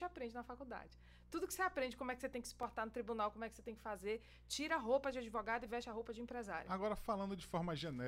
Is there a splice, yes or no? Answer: no